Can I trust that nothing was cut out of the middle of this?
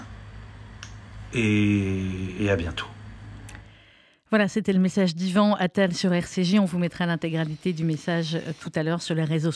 yes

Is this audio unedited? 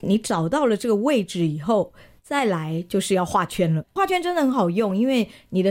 yes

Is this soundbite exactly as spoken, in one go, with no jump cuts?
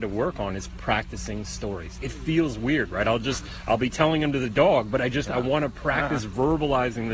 yes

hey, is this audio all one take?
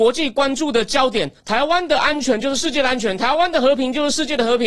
no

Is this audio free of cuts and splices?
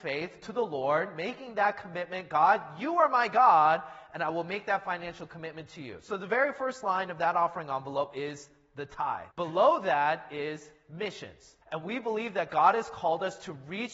no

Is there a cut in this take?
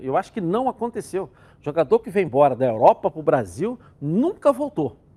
no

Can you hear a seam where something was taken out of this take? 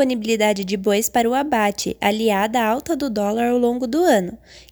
no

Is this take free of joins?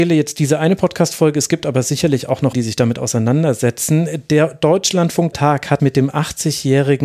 no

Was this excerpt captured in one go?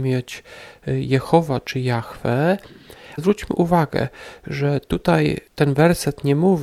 no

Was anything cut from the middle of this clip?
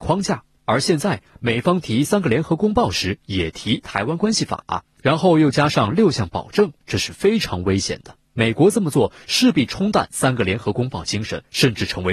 yes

